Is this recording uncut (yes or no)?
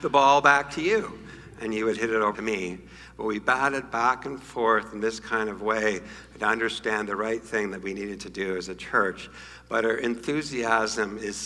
no